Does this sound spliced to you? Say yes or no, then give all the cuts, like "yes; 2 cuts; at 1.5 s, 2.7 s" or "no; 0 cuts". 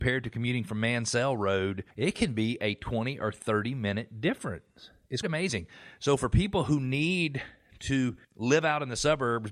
yes; 3 cuts; at 1.9 s, 5.2 s, 8.2 s